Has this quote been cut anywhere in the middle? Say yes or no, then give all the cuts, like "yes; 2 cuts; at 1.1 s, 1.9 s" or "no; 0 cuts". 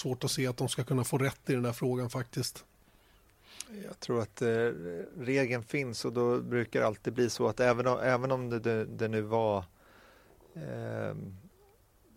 no; 0 cuts